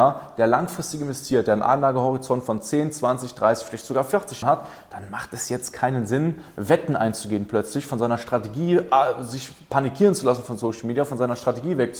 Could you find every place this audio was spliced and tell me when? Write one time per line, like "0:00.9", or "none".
0:04.4